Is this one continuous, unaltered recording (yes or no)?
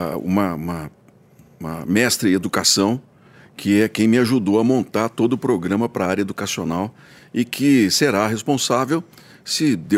yes